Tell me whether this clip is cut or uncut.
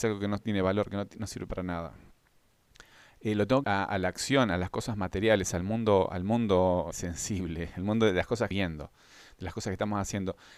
cut